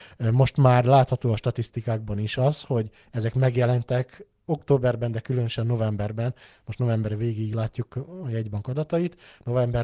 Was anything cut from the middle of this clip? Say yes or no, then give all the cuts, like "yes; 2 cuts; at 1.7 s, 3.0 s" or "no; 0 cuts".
no; 0 cuts